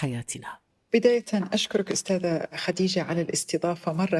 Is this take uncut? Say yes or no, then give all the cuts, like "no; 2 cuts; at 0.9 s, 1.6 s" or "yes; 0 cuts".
yes; 0 cuts